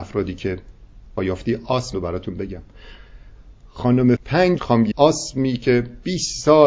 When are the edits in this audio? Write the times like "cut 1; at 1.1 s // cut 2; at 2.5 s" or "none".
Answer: cut 1; at 1.2 s // cut 2; at 1.9 s // cut 3; at 4.2 s // cut 4; at 4.6 s // cut 5; at 4.9 s